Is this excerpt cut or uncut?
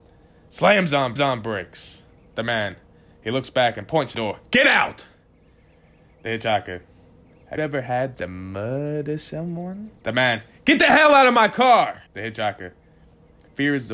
cut